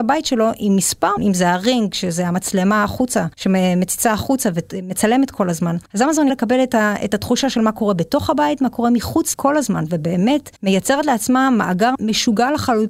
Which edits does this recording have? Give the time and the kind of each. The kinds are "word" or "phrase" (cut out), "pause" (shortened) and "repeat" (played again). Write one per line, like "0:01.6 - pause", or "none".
0:01.2 - phrase
0:03.3 - pause
0:05.9 - pause
0:06.3 - word
0:09.3 - word
0:10.6 - pause
0:11.9 - word